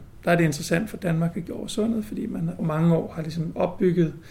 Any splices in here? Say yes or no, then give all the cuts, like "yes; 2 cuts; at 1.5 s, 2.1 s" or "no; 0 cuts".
yes; 2 cuts; at 1.5 s, 2.6 s